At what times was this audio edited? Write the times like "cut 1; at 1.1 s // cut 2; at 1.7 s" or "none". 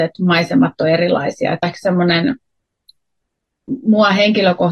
cut 1; at 1.6 s